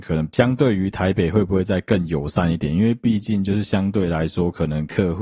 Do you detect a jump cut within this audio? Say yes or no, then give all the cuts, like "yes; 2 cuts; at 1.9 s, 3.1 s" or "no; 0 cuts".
no; 0 cuts